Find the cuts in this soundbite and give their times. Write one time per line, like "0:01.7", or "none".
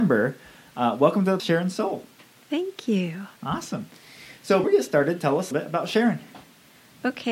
0:01.4
0:04.6
0:05.5